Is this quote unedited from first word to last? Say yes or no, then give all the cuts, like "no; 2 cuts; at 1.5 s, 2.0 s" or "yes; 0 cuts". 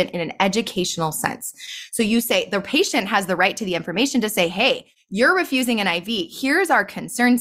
yes; 0 cuts